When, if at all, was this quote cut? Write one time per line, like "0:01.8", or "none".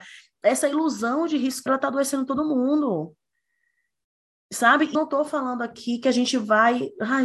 0:01.7
0:04.9